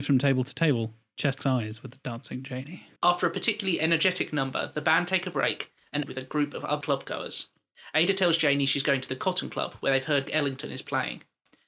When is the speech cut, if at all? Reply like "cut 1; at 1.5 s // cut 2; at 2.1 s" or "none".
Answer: cut 1; at 1.4 s // cut 2; at 3.0 s // cut 3; at 6.0 s // cut 4; at 6.8 s // cut 5; at 10.3 s